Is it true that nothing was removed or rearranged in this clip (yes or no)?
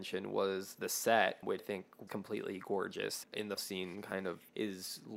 no